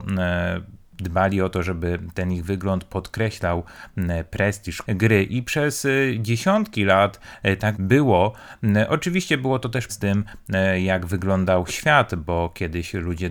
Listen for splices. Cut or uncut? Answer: cut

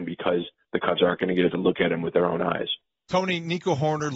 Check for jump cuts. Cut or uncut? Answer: cut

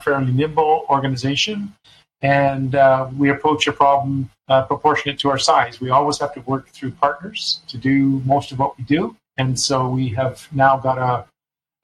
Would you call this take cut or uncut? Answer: cut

